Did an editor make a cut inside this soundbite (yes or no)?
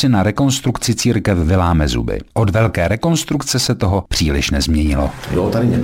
no